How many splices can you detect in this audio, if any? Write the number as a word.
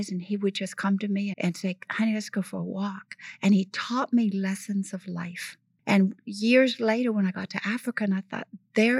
one